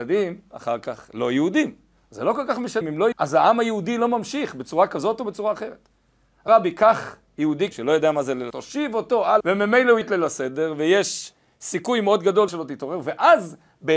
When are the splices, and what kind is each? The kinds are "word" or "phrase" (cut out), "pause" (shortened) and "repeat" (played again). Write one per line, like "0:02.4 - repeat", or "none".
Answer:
0:02.8 - word
0:03.1 - word
0:06.5 - word
0:07.7 - word
0:08.5 - word
0:09.4 - word
0:10.0 - word
0:12.5 - word

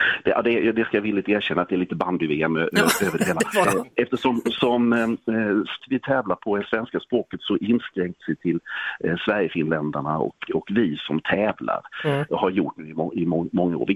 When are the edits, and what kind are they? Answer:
0:03.6 - word
0:05.8 - word
0:08.2 - word
0:10.5 - word

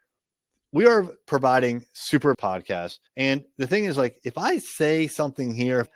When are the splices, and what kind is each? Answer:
0:02.3 - phrase
0:03.1 - pause

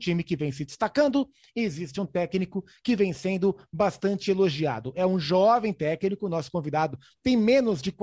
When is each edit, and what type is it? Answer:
none

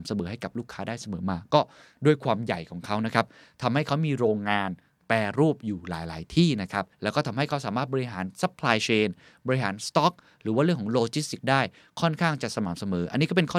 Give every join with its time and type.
0:06.9 - pause

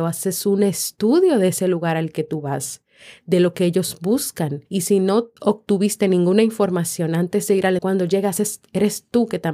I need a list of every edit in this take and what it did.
0:04.7 - pause
0:05.4 - pause
0:07.8 - word

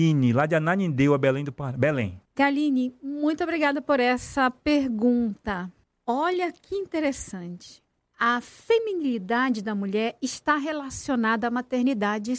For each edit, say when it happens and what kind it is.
0:02.3 - pause
0:05.8 - pause
0:08.0 - pause

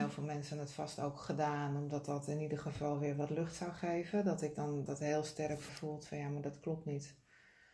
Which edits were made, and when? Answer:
0:04.9 - word
0:05.7 - word

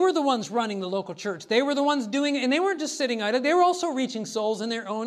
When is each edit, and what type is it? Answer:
none

